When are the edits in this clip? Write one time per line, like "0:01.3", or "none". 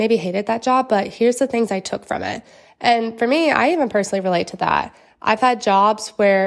none